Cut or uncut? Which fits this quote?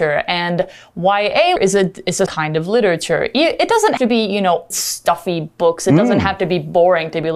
cut